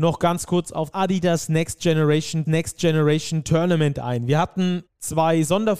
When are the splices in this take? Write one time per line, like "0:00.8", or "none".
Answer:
0:00.9
0:02.5
0:04.9